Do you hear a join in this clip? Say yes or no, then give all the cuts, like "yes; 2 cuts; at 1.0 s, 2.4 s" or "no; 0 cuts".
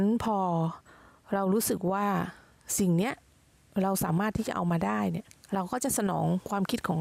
yes; 1 cut; at 5.3 s